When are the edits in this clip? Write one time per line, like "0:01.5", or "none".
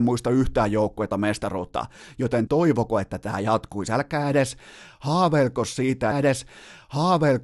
0:01.1
0:02.5
0:06.1